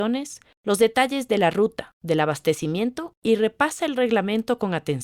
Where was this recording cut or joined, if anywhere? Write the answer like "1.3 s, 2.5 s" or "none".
none